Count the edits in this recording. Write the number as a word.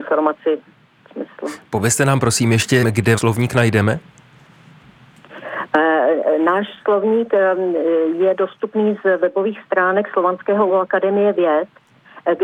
four